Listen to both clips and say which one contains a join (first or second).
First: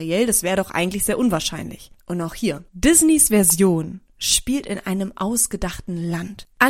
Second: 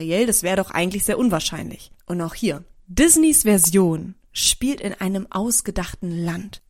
first